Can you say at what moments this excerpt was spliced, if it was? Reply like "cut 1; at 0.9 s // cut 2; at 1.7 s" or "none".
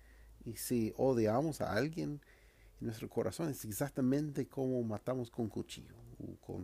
none